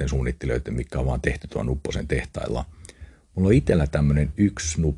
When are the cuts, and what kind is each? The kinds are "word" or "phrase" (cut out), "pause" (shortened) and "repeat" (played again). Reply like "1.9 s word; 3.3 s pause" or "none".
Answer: none